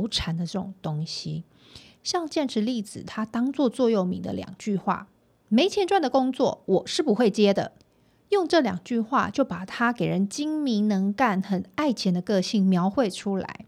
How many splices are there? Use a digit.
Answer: 2